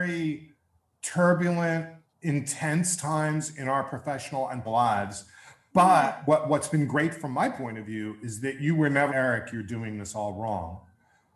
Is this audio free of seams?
no; 3 cuts; at 2.1 s, 4.6 s, 9.1 s

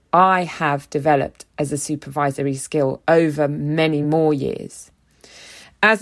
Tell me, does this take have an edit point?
no; 0 cuts

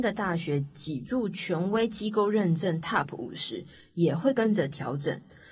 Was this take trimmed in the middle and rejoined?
no; 0 cuts

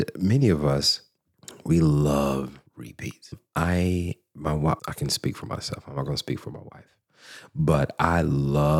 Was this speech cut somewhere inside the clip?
yes; 2 cuts; at 2.7 s, 4.8 s

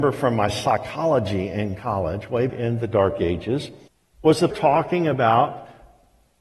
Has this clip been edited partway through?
yes; 4 cuts; at 1.8 s, 2.5 s, 3.9 s, 4.5 s

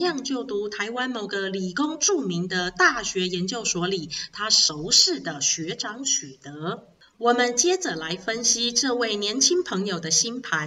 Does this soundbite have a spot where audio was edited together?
no; 0 cuts

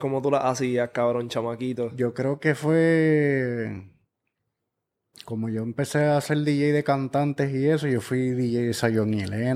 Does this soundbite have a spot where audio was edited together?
no; 0 cuts

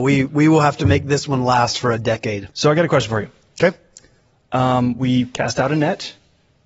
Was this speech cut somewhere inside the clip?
yes; 1 cut; at 2.5 s

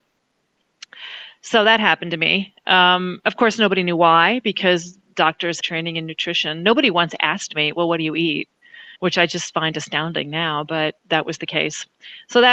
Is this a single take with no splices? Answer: no; 2 cuts; at 5.6 s, 9.0 s

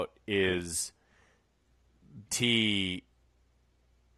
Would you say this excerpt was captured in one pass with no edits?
no; 1 cut; at 2.3 s

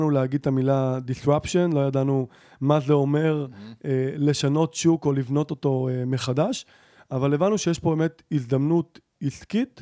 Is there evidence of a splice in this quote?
no; 0 cuts

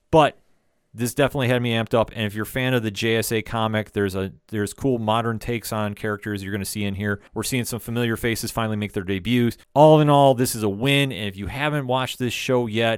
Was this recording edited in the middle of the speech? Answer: yes; 2 cuts; at 7.3 s, 9.6 s

